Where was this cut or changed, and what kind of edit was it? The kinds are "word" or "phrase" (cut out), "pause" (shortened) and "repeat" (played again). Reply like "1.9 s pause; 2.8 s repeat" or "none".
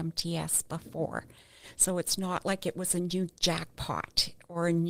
none

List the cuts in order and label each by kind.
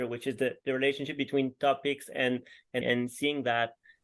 2.8 s word

